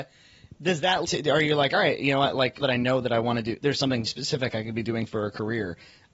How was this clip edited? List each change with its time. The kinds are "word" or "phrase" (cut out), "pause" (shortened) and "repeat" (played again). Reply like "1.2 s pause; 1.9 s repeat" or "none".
1.0 s word; 2.6 s word; 3.6 s word; 4.1 s word